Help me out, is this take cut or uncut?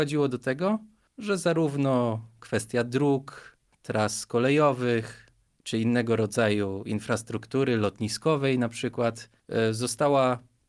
uncut